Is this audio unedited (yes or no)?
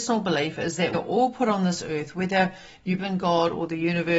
no